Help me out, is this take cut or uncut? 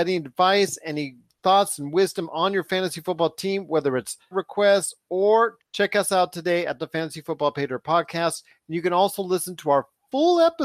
cut